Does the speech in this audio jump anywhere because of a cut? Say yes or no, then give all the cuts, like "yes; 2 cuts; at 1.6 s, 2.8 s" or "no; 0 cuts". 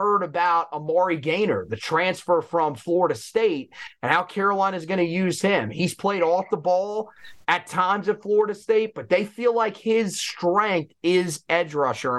yes; 1 cut; at 7.4 s